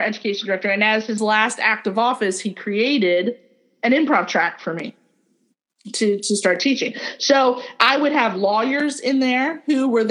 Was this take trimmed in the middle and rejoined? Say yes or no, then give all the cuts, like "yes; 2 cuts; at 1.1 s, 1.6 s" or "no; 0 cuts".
no; 0 cuts